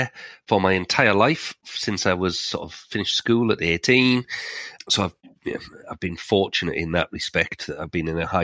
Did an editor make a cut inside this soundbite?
yes; 1 cut; at 4.8 s

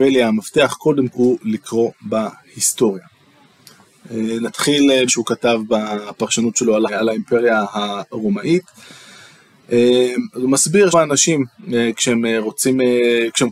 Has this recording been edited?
yes; 4 cuts; at 1.1 s, 5.1 s, 6.9 s, 10.9 s

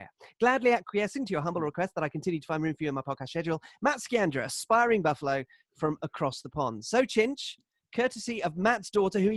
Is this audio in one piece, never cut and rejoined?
yes; 0 cuts

